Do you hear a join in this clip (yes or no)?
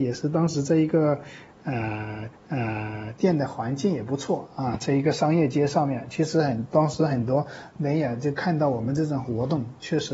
yes